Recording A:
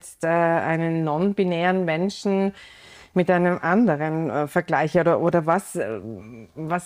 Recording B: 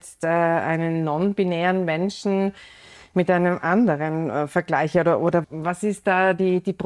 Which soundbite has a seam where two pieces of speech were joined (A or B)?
B